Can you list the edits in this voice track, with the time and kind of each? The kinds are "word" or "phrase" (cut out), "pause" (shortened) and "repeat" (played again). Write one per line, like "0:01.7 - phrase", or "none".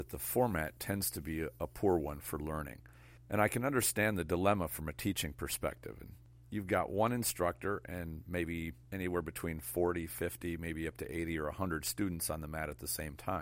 0:08.8 - pause